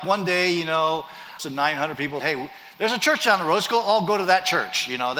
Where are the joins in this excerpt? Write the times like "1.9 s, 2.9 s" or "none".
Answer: 1.4 s, 2.2 s